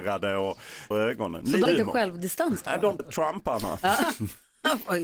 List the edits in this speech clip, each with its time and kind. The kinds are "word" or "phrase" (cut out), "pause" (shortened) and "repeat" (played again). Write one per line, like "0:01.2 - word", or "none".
0:00.9 - word
0:01.7 - word
0:02.7 - word
0:03.0 - word